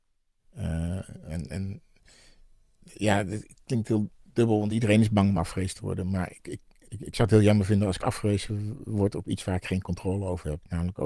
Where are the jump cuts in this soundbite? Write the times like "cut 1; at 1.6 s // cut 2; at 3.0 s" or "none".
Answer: none